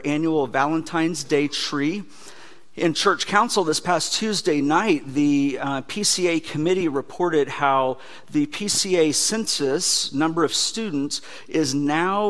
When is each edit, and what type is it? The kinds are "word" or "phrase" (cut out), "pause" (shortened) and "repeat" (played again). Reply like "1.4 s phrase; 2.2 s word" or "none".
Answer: none